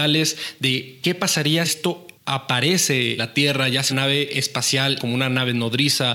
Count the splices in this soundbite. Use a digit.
4